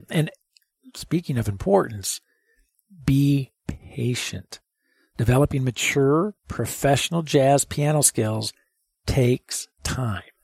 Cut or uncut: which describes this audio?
uncut